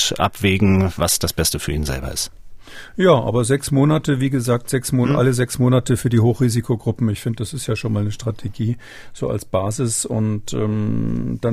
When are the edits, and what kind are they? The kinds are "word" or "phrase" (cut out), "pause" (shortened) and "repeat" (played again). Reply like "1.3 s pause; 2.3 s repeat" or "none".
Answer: none